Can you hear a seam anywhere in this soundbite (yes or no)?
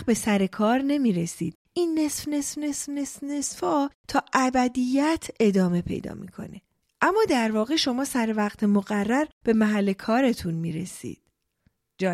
no